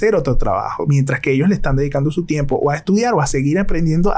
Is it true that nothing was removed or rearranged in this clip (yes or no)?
yes